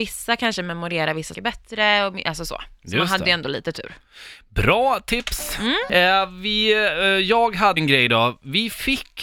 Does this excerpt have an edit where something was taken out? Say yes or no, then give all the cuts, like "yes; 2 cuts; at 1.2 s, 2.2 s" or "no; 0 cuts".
yes; 2 cuts; at 1.3 s, 7.8 s